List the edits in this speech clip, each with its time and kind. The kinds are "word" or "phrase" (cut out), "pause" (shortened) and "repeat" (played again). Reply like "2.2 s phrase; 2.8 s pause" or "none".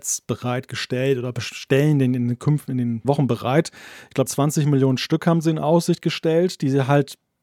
3.0 s word; 4.3 s word